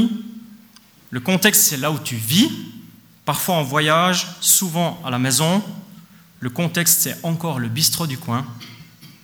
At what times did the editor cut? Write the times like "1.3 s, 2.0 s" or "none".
none